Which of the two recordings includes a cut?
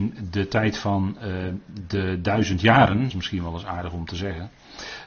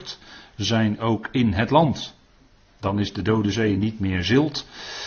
first; 1 cut; at 3.1 s

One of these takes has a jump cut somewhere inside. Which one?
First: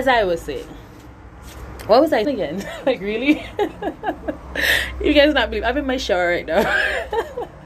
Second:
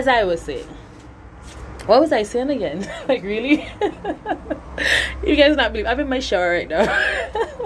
first; 1 cut; at 2.2 s

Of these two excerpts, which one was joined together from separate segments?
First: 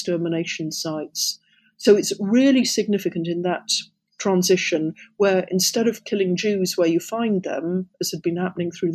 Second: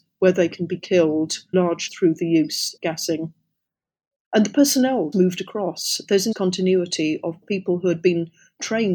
second; 6 cuts; at 1.5 s, 1.9 s, 2.8 s, 5.1 s, 6.3 s, 7.4 s

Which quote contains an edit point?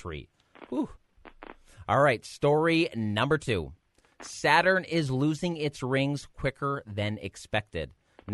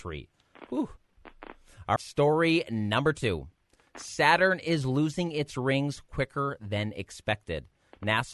second; 1 cut; at 2.0 s

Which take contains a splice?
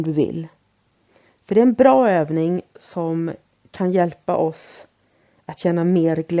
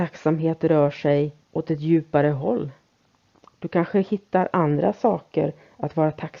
second; 2 cuts; at 1.4 s, 3.1 s

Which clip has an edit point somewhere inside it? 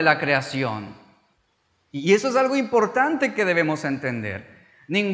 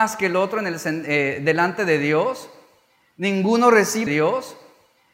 second; 1 cut; at 4.1 s

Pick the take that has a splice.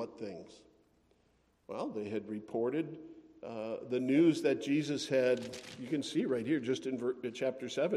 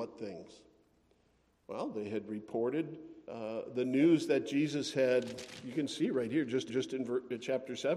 second; 2 cuts; at 3.2 s, 6.7 s

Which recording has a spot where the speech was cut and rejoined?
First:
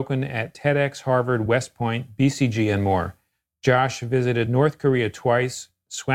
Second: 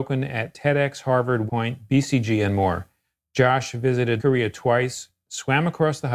second; 2 cuts; at 1.5 s, 4.2 s

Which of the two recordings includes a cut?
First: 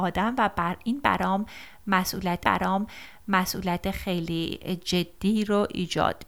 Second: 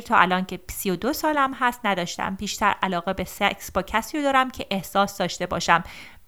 first; 1 cut; at 2.4 s

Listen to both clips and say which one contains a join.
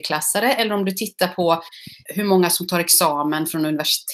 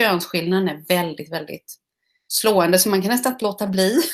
first; 1 cut; at 2.1 s

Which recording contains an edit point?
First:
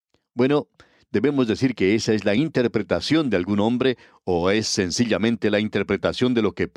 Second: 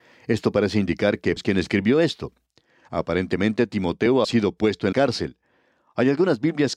second; 3 cuts; at 1.4 s, 4.2 s, 4.9 s

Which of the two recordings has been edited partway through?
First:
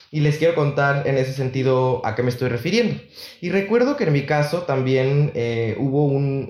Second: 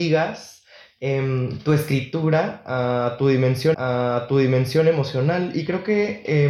second; 1 cut; at 3.7 s

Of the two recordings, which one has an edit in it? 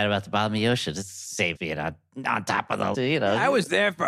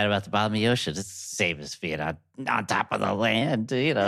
first; 2 cuts; at 1.6 s, 2.9 s

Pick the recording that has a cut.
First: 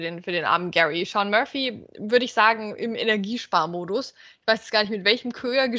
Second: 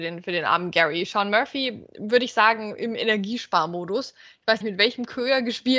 second; 1 cut; at 4.6 s

